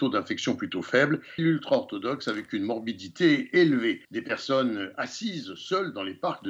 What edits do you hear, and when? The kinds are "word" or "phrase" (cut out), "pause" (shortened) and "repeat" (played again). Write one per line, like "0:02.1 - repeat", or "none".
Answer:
0:01.4 - phrase
0:04.0 - pause